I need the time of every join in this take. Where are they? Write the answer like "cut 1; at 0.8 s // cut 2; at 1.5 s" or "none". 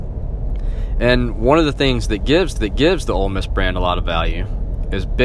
cut 1; at 2.6 s